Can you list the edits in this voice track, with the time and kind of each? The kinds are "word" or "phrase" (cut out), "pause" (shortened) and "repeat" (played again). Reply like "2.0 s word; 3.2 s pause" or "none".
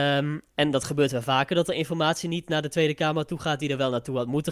none